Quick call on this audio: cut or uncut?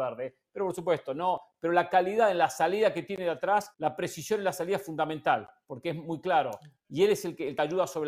cut